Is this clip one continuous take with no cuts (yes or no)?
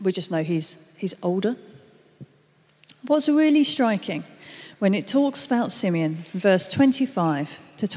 yes